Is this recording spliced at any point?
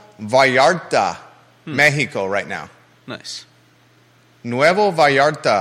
no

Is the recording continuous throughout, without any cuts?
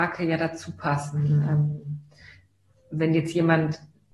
yes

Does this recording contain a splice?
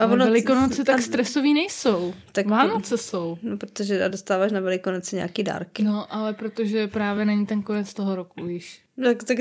no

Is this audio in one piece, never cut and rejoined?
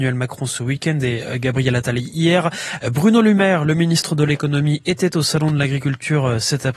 yes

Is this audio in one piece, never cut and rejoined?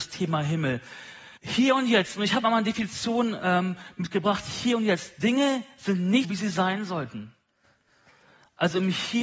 no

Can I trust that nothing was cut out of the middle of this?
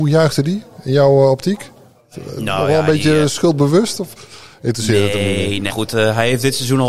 no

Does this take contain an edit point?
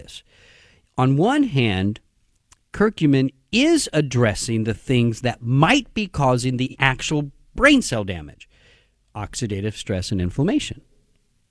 no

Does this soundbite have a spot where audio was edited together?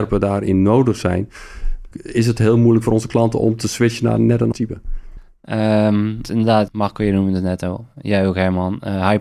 yes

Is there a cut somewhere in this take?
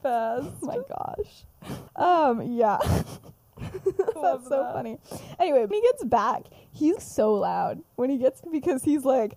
yes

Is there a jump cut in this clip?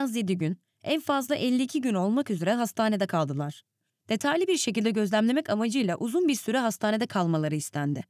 no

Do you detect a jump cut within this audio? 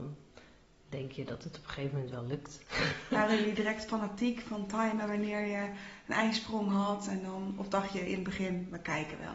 no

